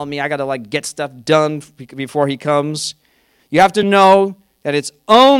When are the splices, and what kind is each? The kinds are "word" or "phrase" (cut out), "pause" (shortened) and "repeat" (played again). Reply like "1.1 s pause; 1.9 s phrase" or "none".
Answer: none

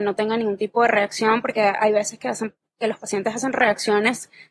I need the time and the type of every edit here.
none

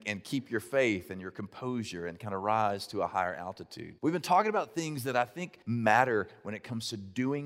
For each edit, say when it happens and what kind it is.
4.0 s pause; 5.6 s pause

